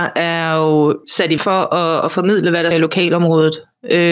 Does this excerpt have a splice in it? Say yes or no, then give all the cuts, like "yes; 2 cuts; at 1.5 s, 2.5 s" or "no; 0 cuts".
yes; 3 cuts; at 1.0 s, 1.4 s, 2.7 s